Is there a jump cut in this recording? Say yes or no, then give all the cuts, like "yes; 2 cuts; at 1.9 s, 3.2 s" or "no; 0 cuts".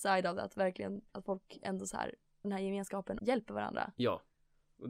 yes; 2 cuts; at 2.4 s, 3.2 s